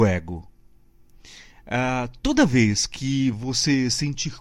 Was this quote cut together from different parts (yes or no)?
no